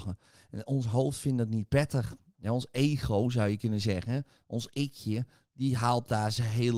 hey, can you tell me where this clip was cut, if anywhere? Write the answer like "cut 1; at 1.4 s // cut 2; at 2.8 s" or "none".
none